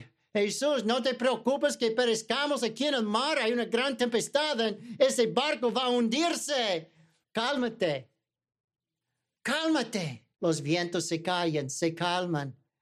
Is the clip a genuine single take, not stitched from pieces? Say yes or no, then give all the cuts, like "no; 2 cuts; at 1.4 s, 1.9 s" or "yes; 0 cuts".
no; 2 cuts; at 7.2 s, 10.3 s